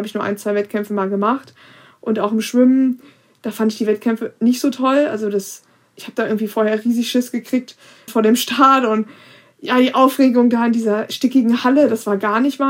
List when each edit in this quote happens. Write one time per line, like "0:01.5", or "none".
0:08.1